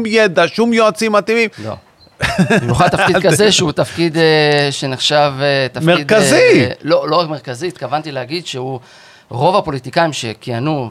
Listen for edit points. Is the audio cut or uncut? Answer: cut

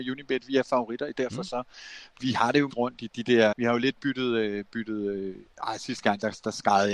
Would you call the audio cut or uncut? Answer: cut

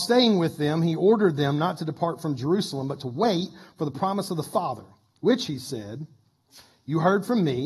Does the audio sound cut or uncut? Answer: uncut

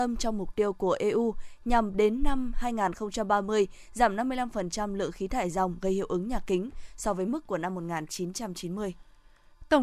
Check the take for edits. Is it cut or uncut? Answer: uncut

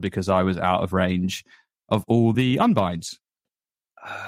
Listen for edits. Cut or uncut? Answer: uncut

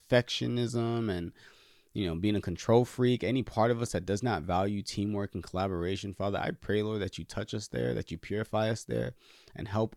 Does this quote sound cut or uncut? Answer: uncut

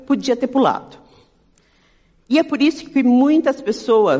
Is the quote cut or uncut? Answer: uncut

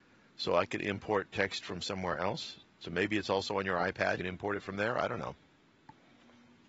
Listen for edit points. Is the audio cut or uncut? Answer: cut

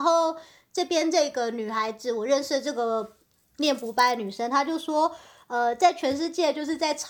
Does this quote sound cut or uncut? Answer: uncut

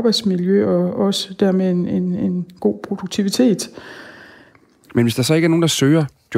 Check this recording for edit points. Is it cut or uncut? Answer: uncut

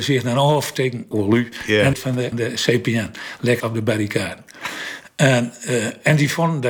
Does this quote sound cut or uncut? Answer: cut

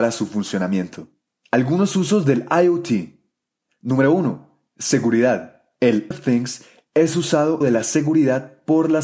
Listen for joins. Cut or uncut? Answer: cut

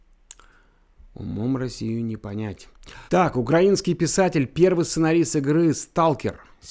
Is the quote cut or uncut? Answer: cut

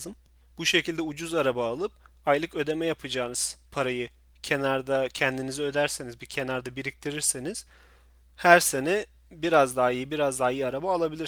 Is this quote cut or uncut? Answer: uncut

